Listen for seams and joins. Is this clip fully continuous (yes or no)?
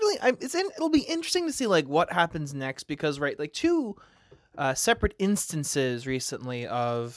yes